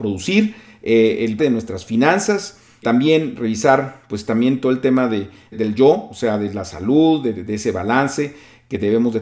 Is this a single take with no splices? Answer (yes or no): no